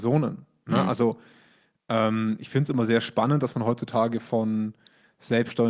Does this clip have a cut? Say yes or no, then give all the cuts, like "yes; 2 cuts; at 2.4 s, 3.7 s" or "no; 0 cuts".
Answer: no; 0 cuts